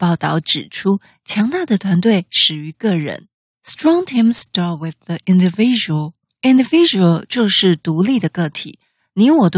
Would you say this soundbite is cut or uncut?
uncut